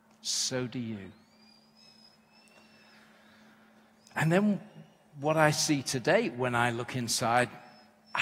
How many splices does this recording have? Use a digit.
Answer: 0